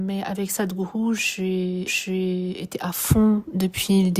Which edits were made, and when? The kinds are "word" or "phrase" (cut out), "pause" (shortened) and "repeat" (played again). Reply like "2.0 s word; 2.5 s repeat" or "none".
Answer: 1.9 s repeat